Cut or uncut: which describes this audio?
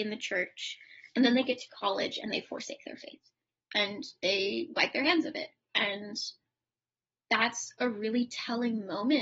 uncut